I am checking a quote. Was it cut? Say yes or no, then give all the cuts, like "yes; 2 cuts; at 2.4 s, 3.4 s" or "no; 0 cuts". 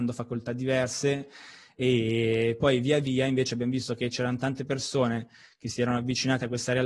no; 0 cuts